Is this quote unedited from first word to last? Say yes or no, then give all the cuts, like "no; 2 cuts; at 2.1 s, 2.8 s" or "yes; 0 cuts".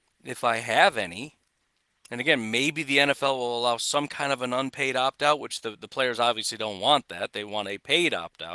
yes; 0 cuts